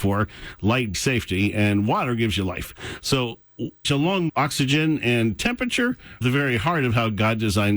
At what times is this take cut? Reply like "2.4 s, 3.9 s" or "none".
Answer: 0.9 s, 3.8 s, 4.3 s, 6.2 s